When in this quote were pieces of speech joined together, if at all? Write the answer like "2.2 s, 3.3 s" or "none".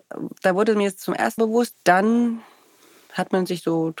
1.4 s, 1.7 s